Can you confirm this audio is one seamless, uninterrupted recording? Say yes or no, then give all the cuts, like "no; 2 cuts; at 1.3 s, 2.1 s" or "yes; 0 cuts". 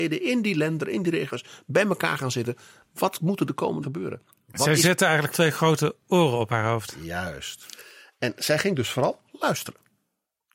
no; 2 cuts; at 3.8 s, 5.3 s